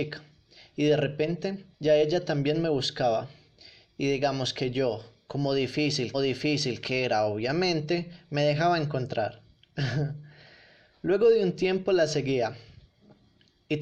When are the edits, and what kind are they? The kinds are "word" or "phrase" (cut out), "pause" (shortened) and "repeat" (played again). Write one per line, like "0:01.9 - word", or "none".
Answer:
0:01.7 - pause
0:06.1 - repeat